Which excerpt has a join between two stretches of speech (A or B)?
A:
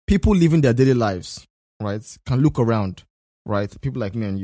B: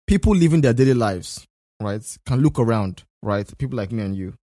B